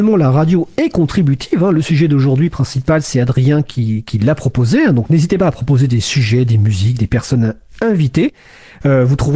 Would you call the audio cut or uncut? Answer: uncut